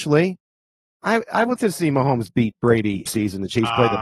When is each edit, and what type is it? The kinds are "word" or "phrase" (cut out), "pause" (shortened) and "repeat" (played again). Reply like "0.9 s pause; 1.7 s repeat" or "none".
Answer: 1.6 s word; 3.1 s phrase